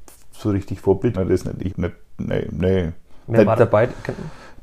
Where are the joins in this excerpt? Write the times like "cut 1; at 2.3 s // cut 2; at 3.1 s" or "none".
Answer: cut 1; at 1.1 s // cut 2; at 1.7 s // cut 3; at 3.6 s